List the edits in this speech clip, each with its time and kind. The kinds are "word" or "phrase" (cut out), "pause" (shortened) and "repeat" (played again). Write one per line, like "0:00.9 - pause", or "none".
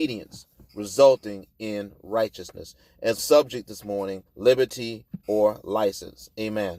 0:03.2 - phrase
0:04.3 - pause